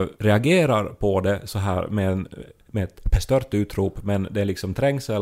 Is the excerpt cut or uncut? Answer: uncut